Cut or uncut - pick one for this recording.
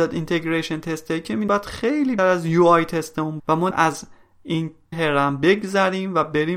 cut